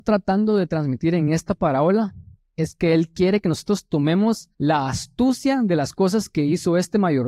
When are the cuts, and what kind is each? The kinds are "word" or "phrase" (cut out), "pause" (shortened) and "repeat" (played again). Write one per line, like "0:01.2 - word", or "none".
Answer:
0:04.5 - pause